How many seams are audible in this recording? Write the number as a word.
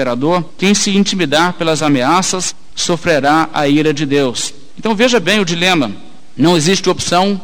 zero